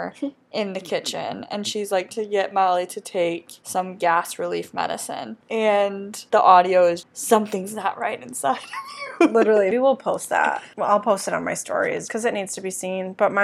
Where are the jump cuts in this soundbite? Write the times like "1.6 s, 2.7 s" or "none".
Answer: 2.1 s, 7.0 s, 9.7 s, 12.1 s